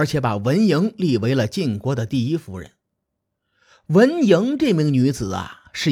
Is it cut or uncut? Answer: uncut